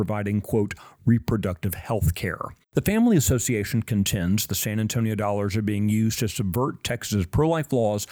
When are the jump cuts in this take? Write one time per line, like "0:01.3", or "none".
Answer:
0:02.6